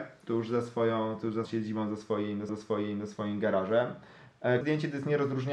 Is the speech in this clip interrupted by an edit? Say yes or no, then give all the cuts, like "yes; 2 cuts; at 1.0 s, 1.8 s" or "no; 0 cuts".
yes; 3 cuts; at 1.4 s, 2.5 s, 4.6 s